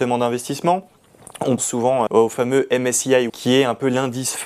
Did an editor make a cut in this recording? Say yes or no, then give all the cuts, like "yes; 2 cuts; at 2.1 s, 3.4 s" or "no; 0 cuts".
yes; 3 cuts; at 1.6 s, 2.1 s, 3.3 s